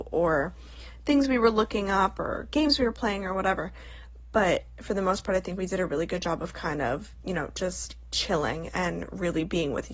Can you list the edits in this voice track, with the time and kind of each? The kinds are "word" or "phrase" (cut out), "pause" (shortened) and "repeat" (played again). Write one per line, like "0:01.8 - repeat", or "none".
none